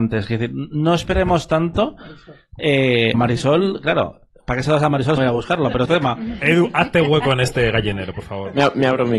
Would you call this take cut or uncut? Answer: cut